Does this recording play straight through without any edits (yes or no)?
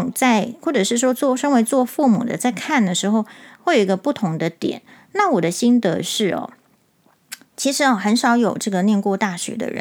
yes